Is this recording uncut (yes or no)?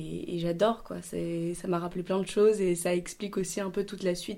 yes